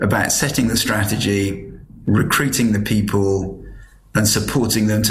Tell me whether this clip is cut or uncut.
uncut